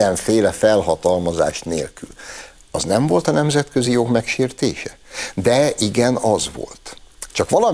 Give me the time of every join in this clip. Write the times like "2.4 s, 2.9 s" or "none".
none